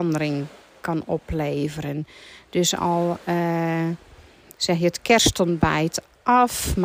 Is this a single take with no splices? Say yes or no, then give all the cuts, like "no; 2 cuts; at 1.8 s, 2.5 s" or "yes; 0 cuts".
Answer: yes; 0 cuts